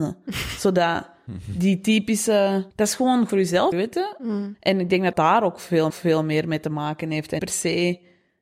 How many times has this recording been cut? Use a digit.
6